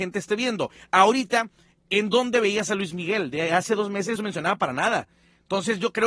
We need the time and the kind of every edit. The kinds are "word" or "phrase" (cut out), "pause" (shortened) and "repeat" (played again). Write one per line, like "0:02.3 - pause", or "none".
0:04.2 - word